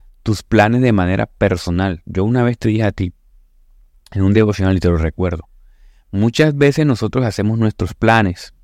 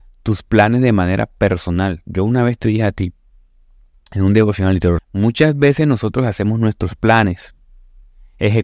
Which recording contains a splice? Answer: second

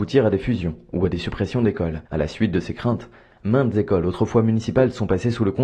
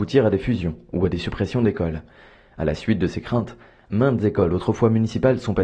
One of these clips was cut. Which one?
first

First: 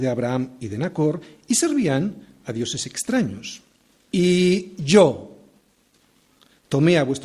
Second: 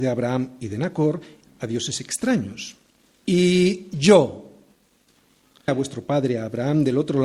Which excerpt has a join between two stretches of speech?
second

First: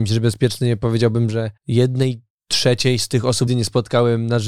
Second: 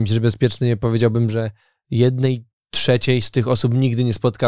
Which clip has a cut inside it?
first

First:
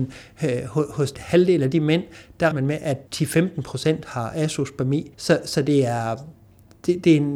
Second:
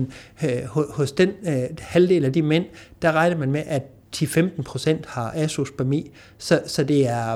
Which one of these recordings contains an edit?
first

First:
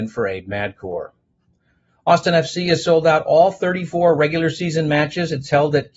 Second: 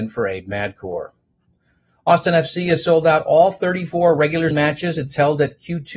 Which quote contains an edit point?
second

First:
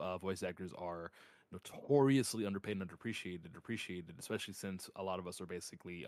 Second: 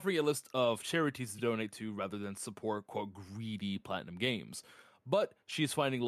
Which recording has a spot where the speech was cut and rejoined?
first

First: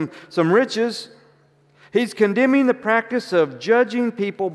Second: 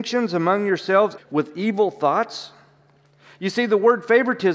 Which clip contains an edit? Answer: second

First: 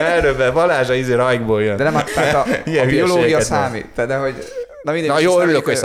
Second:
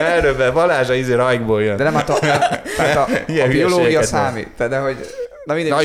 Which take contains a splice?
first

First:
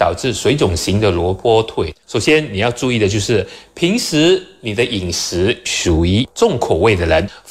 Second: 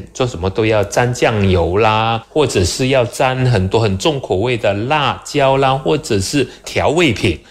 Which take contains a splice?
first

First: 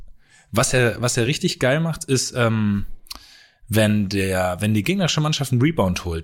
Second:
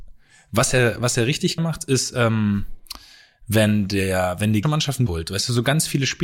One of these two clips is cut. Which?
second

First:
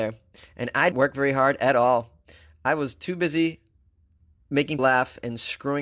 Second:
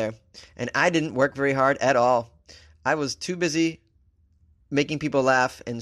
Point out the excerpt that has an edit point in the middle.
first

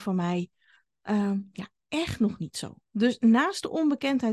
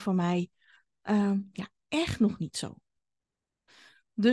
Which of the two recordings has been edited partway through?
first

